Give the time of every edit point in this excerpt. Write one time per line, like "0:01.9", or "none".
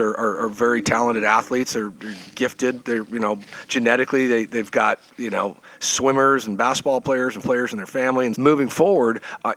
0:07.4
0:08.3